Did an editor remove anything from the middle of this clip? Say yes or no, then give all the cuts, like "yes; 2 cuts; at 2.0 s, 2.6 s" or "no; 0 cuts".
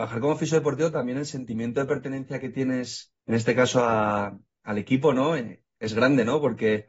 yes; 1 cut; at 3.2 s